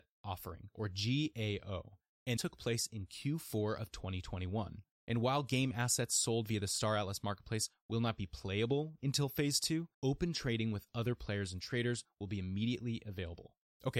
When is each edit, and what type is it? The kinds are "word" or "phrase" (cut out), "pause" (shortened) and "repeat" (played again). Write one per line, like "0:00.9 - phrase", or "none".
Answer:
0:02.4 - word
0:09.9 - pause